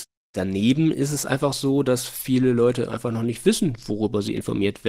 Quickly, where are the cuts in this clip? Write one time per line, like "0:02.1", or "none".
none